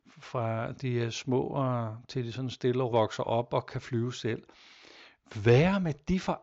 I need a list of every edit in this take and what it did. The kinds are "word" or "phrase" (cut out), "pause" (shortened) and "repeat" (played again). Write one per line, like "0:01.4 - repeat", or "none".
0:02.9 - word